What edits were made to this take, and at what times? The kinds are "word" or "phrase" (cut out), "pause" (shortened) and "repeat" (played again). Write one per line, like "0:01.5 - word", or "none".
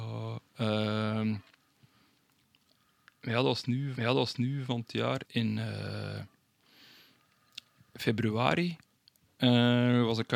0:04.0 - repeat
0:05.2 - word